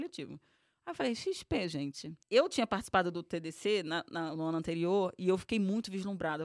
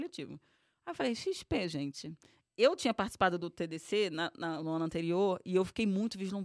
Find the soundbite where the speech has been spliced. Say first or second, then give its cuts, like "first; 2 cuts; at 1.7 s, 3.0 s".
first; 1 cut; at 2.2 s